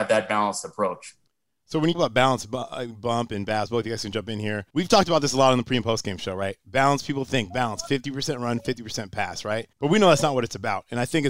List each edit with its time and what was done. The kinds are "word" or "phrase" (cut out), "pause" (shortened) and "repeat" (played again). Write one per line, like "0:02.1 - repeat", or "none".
0:01.9 - word
0:04.7 - pause
0:09.7 - pause